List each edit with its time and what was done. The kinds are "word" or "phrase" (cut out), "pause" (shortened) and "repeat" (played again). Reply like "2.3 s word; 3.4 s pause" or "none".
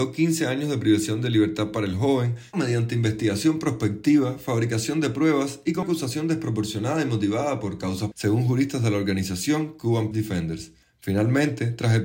2.5 s word; 5.8 s word; 8.1 s word; 10.1 s word